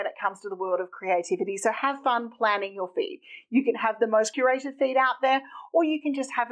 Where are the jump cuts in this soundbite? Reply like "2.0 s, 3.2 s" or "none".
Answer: none